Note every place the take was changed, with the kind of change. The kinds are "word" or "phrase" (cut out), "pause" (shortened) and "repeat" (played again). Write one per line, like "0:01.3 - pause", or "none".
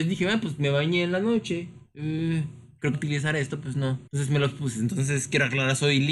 0:02.9 - phrase
0:03.6 - word
0:04.1 - pause

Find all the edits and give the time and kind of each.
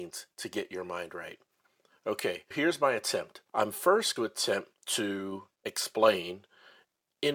0:02.5 - word
0:03.5 - pause
0:04.2 - phrase
0:04.8 - pause

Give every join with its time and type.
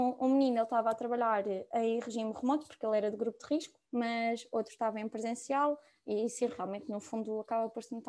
0:03.9 - pause

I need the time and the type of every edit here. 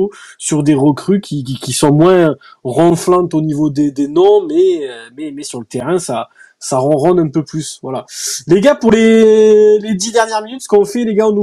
none

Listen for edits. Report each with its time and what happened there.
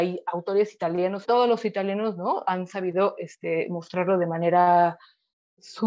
0:01.2 - word

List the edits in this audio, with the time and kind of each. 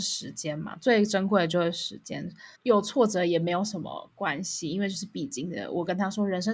0:02.5 - pause

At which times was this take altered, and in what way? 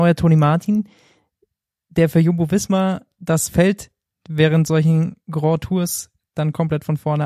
none

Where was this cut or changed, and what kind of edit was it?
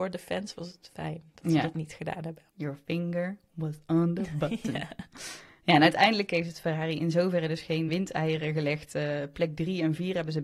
0:02.5 - pause
0:07.9 - word

